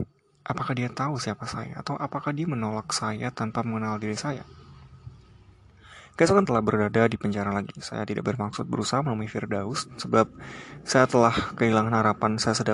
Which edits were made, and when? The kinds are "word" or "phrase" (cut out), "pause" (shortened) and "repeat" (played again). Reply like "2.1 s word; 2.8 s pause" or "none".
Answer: 6.4 s phrase